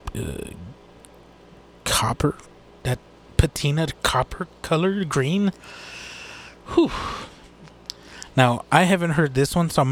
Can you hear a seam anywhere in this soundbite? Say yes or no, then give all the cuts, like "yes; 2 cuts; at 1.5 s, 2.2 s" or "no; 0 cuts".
no; 0 cuts